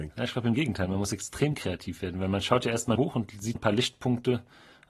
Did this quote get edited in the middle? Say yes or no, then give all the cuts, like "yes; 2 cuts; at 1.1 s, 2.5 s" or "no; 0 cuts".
yes; 2 cuts; at 2.9 s, 3.5 s